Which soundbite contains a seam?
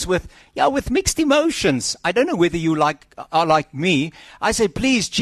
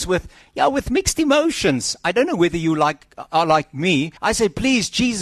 second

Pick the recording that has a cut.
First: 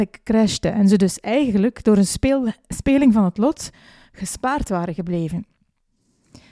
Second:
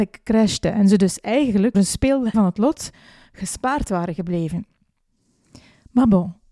second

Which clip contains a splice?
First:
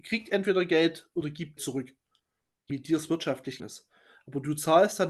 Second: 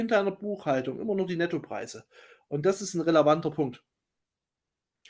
first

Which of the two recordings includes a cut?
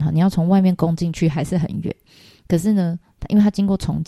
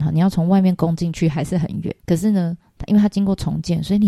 second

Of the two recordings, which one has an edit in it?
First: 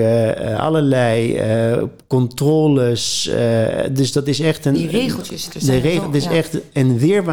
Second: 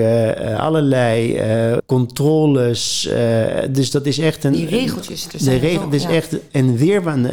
second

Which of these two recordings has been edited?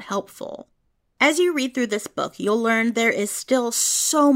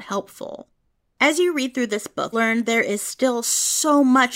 second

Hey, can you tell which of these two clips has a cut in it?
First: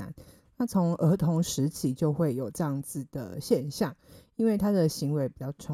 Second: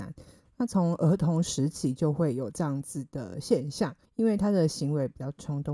second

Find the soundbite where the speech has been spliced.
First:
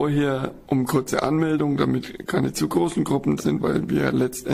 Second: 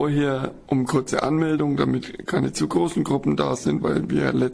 first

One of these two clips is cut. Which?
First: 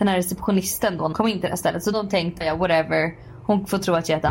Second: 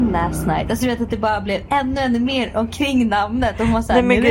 first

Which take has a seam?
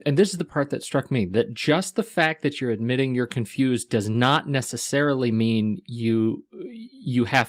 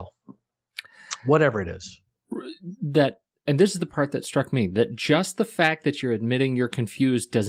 second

